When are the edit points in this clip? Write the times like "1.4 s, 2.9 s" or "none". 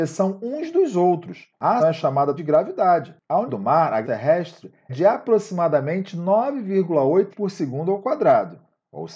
1.8 s, 2.4 s, 3.5 s, 4.0 s, 4.9 s, 7.3 s